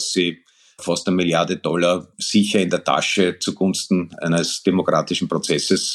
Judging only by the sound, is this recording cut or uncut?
uncut